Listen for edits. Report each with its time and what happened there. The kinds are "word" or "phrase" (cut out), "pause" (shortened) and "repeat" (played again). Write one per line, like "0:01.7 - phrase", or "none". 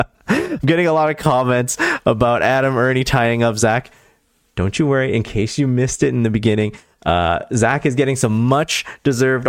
none